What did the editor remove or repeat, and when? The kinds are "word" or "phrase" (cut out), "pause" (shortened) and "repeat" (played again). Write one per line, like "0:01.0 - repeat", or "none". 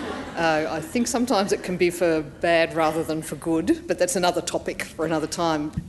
none

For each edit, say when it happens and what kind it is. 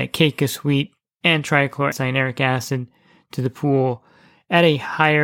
0:01.9 - word

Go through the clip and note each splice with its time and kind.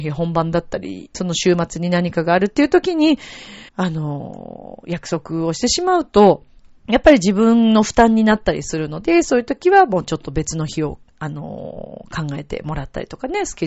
0:01.1 - word
0:03.7 - pause
0:06.6 - pause

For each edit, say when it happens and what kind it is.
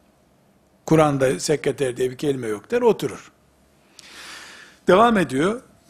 none

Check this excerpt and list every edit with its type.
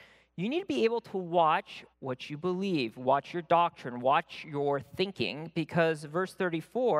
0:01.9 - pause

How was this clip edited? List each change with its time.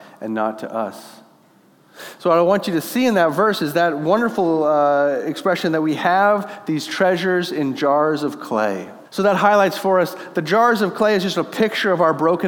0:09.0 - pause

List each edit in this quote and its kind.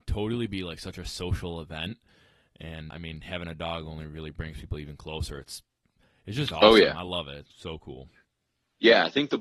0:02.9 - word
0:07.4 - word

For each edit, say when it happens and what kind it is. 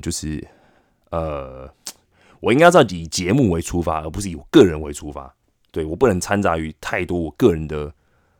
none

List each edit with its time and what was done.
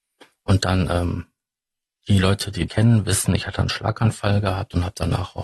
0:02.7 - word

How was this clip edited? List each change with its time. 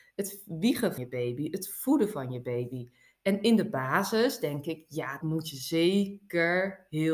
0:01.0 - word
0:05.2 - word

